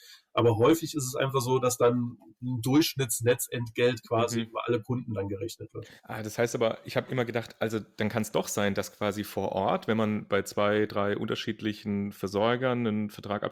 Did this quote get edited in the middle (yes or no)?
yes